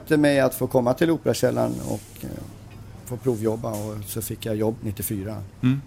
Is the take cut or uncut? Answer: cut